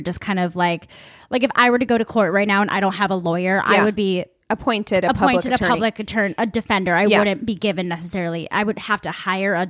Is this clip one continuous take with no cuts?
yes; 0 cuts

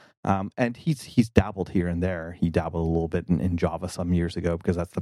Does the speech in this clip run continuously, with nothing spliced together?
yes; 0 cuts

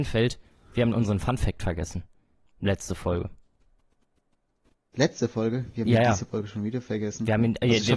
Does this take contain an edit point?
no; 0 cuts

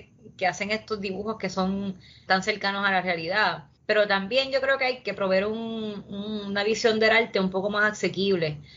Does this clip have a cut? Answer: yes; 2 cuts; at 2.3 s, 3.8 s

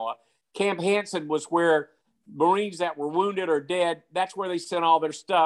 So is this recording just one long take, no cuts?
yes; 0 cuts

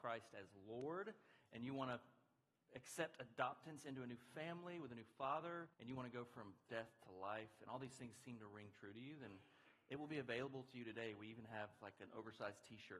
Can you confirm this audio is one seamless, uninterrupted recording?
no; 1 cut; at 5.7 s

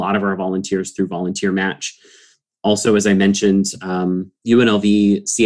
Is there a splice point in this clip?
no; 0 cuts

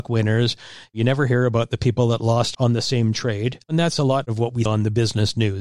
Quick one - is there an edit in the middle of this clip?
yes; 3 cuts; at 2.5 s, 3.6 s, 4.7 s

